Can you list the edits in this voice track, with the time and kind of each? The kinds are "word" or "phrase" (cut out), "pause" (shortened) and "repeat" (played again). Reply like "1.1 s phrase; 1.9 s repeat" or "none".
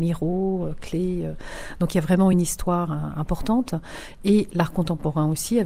none